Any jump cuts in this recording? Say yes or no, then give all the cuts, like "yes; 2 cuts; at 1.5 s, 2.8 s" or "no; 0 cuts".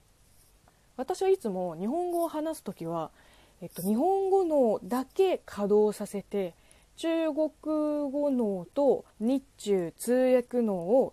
yes; 1 cut; at 9.1 s